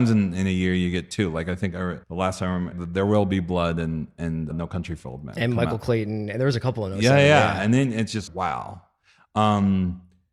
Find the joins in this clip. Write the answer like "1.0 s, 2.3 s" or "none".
2.0 s, 2.7 s, 4.5 s, 8.3 s